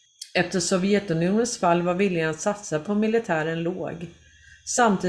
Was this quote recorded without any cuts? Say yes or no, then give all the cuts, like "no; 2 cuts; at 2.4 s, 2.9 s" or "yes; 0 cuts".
yes; 0 cuts